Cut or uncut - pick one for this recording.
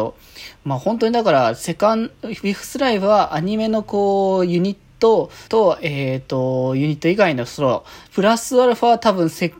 cut